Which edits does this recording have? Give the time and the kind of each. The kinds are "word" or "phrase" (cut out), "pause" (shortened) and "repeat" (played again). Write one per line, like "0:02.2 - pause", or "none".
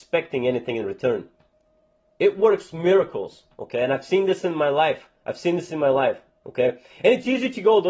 0:05.2 - pause

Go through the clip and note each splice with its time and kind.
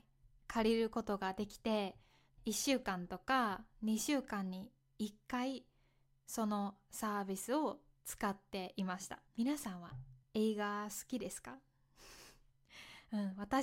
0:09.3 - pause
0:10.2 - pause

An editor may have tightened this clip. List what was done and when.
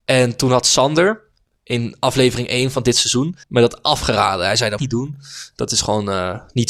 0:03.4 - pause
0:04.8 - phrase

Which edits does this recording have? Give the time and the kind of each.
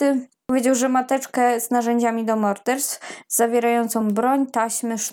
none

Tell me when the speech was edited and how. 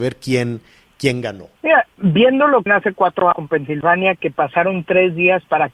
0:01.6 - pause
0:02.7 - phrase
0:03.3 - word

